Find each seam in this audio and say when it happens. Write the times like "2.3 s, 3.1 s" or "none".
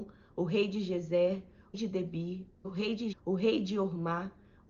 1.7 s, 2.6 s, 3.1 s